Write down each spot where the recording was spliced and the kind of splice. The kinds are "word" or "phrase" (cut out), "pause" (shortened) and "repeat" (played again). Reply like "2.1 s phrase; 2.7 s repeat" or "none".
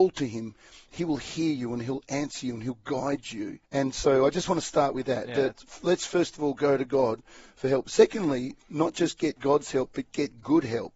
3.6 s pause